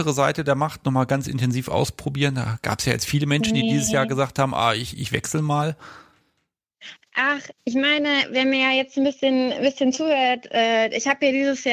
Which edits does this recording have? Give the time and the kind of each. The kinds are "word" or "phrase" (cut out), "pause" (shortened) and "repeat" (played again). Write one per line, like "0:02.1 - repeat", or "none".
0:07.6 - word